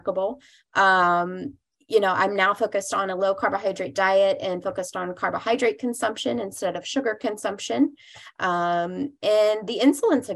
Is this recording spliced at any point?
no; 0 cuts

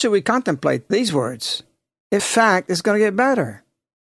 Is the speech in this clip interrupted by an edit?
yes; 1 cut; at 2.2 s

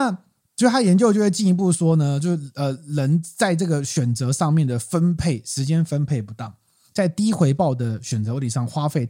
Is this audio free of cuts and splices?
yes; 0 cuts

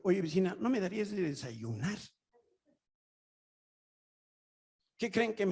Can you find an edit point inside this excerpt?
no; 0 cuts

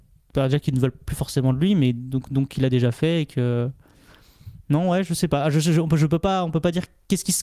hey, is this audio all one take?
yes; 0 cuts

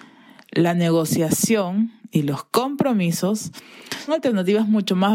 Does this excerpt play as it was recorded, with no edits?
no; 1 cut; at 4.1 s

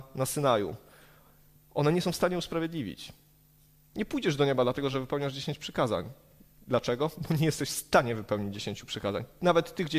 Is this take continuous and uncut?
yes; 0 cuts

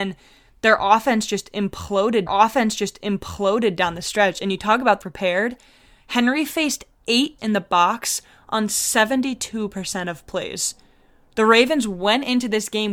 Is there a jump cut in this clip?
yes; 3 cuts; at 2.3 s, 5.0 s, 7.4 s

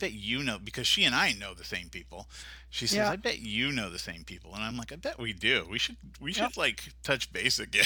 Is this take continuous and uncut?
yes; 0 cuts

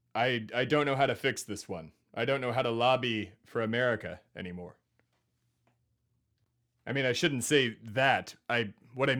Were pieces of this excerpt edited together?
no; 0 cuts

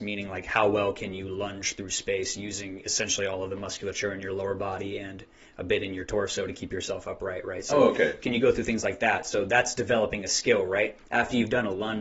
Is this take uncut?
yes; 0 cuts

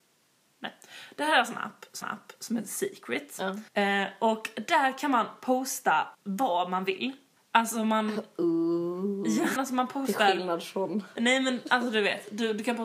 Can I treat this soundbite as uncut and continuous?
no; 5 cuts; at 2.0 s, 3.7 s, 6.1 s, 7.4 s, 9.6 s

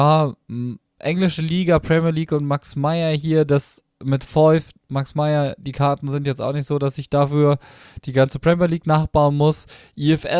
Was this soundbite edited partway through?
no; 0 cuts

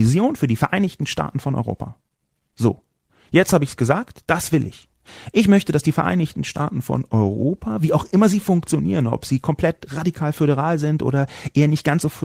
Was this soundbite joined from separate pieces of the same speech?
no; 0 cuts

